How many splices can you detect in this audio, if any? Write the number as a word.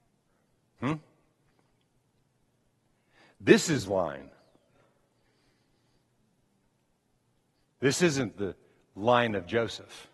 one